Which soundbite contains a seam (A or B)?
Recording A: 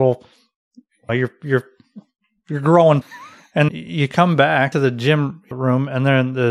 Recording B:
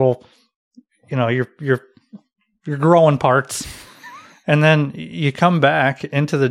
A